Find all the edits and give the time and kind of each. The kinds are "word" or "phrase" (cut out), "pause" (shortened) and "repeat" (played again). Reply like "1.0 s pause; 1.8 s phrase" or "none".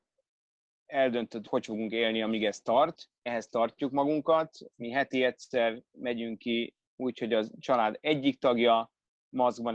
1.5 s word; 3.3 s word; 6.8 s pause